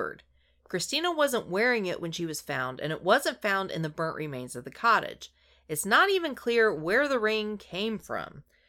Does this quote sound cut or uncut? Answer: uncut